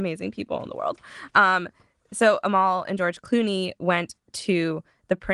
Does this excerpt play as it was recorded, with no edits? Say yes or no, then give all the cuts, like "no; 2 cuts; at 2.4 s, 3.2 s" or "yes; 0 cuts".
yes; 0 cuts